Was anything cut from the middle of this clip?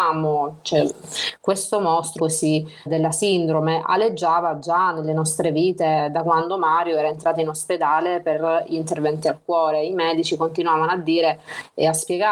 yes; 2 cuts; at 2.2 s, 2.9 s

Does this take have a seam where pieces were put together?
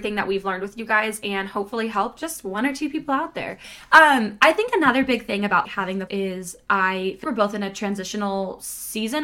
yes; 3 cuts; at 5.6 s, 6.1 s, 7.2 s

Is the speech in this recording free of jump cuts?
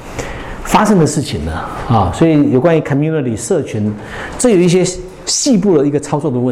yes; 0 cuts

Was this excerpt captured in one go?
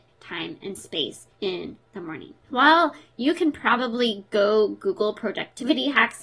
no; 1 cut; at 1.3 s

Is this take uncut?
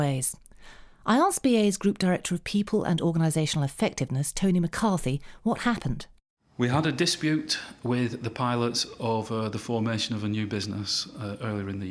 yes; 0 cuts

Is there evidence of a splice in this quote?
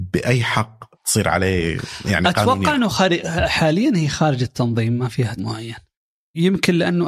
yes; 2 cuts; at 0.9 s, 5.4 s

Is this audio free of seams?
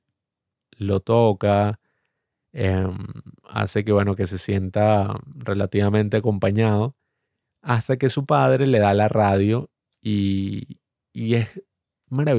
yes; 0 cuts

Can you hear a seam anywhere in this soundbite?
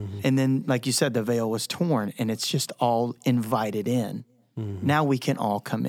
no; 0 cuts

